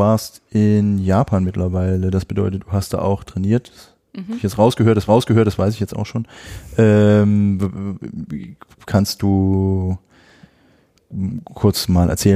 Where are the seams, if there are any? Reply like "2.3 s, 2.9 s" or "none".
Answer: 5.1 s